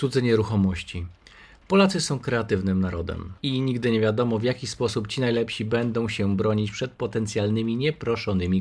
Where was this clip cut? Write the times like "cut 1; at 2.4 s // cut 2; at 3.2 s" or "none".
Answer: cut 1; at 3.4 s